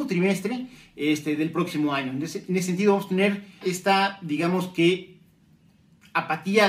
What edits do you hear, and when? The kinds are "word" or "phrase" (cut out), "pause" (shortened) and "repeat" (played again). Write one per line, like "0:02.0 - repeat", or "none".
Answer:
0:03.6 - word